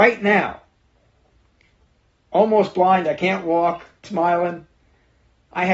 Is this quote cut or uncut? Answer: cut